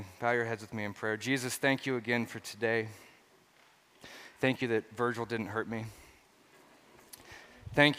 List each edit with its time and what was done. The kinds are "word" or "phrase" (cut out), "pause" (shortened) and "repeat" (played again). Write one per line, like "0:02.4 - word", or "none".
none